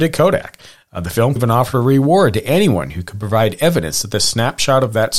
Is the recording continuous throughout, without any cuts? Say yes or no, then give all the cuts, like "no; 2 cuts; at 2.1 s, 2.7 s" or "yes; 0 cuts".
no; 1 cut; at 1.4 s